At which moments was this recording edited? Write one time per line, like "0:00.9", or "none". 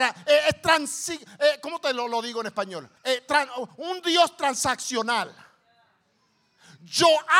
0:03.0